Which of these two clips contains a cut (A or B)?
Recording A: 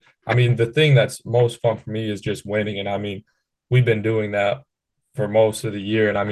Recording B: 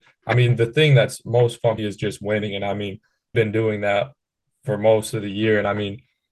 B